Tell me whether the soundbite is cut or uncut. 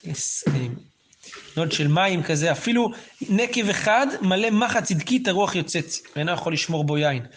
uncut